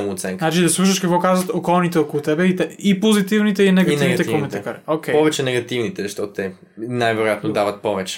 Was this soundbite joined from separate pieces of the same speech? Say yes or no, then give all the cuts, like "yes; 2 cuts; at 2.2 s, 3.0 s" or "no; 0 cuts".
no; 0 cuts